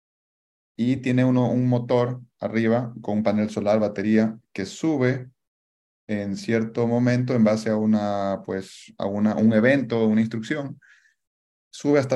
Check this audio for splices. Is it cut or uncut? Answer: uncut